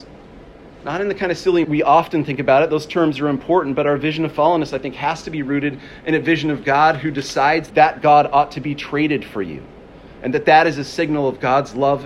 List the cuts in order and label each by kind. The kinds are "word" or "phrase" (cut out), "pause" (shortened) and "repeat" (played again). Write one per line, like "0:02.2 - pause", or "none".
0:01.6 - phrase
0:07.7 - word